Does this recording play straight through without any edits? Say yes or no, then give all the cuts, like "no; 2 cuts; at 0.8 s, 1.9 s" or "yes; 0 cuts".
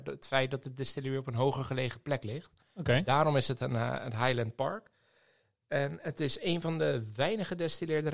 yes; 0 cuts